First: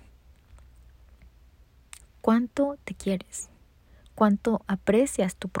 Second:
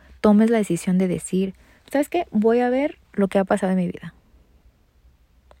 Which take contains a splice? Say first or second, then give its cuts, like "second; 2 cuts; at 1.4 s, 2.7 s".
second; 2 cuts; at 1.8 s, 3.0 s